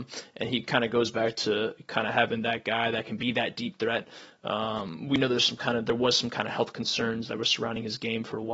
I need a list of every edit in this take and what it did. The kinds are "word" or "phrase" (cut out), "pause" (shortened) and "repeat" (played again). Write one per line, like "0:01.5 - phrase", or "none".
none